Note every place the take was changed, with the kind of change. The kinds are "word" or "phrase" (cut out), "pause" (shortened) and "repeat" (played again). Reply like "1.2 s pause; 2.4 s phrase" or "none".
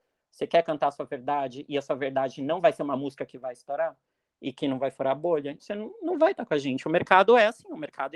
5.6 s word